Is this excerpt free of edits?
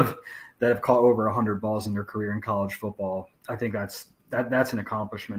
no; 2 cuts; at 3.4 s, 4.2 s

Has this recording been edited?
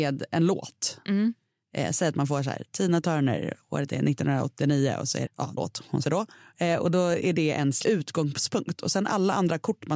yes; 4 cuts; at 5.3 s, 5.6 s, 6.0 s, 7.8 s

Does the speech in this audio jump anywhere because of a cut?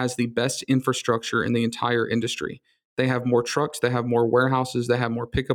no; 0 cuts

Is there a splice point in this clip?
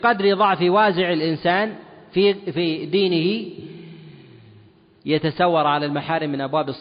no; 0 cuts

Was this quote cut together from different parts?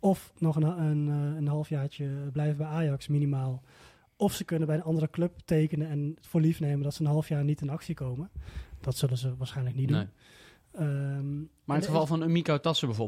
no; 0 cuts

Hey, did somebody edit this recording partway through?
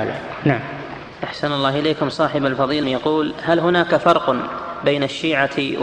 yes; 2 cuts; at 1.1 s, 2.8 s

